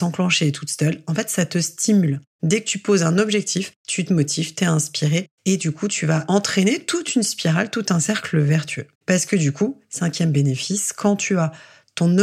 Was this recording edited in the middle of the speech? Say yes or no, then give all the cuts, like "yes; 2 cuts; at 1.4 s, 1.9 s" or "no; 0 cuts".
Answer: yes; 1 cut; at 8.9 s